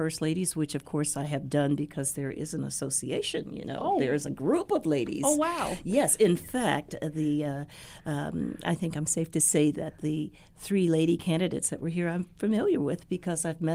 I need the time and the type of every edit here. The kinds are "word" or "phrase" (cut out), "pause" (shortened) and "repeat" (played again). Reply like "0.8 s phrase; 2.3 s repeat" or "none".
none